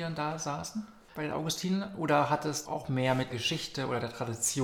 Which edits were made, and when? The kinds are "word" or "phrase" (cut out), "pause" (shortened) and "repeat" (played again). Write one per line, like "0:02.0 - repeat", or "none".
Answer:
0:01.1 - word
0:02.7 - word
0:03.3 - word